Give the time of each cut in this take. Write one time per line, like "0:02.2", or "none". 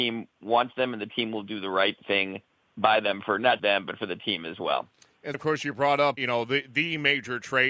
0:03.6
0:05.3
0:06.2